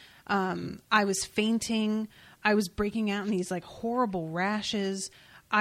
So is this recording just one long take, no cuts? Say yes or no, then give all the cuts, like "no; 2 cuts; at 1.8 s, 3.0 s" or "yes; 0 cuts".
yes; 0 cuts